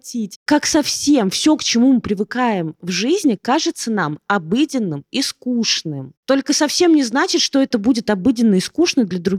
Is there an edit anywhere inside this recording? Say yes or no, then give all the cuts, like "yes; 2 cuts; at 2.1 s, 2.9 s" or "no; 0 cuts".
no; 0 cuts